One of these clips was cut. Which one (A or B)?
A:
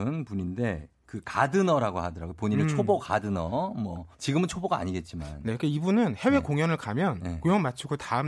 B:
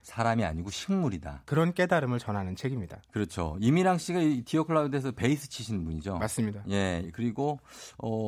A